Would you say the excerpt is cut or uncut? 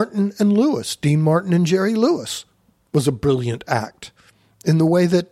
uncut